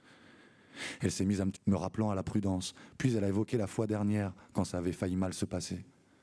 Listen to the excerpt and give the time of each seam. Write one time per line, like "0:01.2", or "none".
0:01.5